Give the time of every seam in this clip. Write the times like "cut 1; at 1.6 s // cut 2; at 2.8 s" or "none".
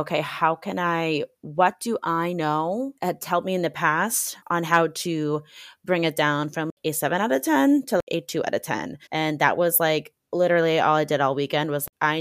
cut 1; at 3.0 s // cut 2; at 4.4 s // cut 3; at 9.1 s // cut 4; at 10.2 s